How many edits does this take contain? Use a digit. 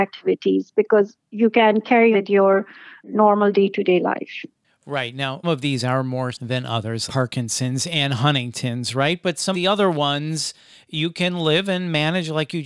6